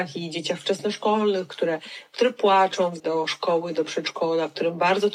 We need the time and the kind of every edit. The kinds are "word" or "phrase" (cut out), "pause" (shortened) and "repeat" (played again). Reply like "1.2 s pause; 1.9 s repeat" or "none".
3.0 s word